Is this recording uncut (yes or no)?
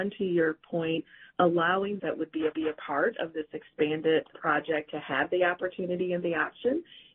no